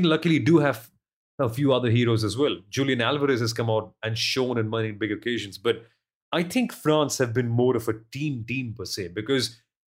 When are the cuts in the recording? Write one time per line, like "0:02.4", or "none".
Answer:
none